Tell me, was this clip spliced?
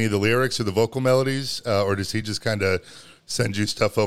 no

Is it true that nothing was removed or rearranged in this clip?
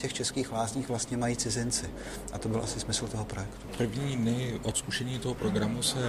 yes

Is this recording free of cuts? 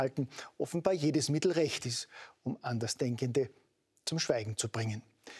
yes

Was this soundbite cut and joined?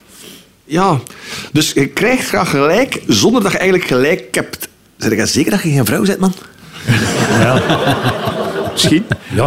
no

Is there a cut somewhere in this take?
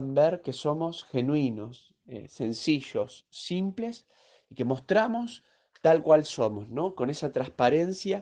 no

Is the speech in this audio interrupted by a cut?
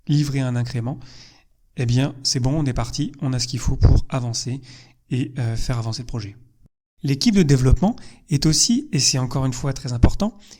no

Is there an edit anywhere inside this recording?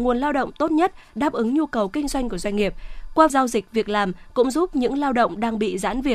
yes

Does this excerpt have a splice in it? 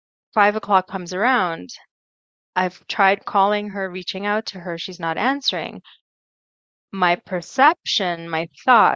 no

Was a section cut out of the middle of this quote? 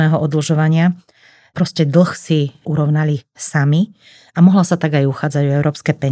no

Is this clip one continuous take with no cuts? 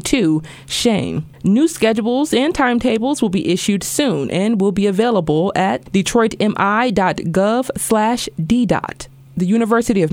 no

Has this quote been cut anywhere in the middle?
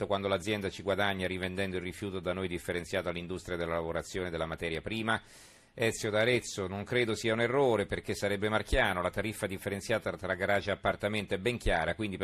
no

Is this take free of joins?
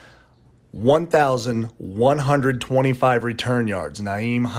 yes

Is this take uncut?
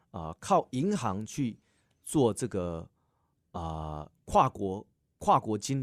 yes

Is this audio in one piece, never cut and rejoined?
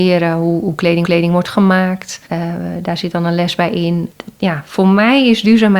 no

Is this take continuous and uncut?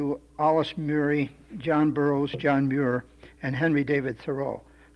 yes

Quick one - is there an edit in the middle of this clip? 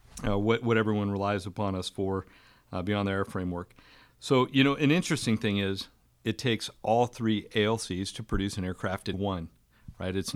yes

